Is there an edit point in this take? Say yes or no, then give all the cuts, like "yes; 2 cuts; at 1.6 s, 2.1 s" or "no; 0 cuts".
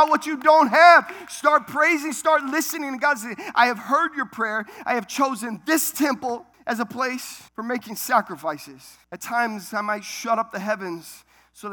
yes; 3 cuts; at 6.5 s, 7.5 s, 9.0 s